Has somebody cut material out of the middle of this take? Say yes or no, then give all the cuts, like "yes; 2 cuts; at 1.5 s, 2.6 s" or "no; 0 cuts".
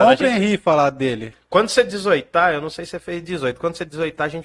no; 0 cuts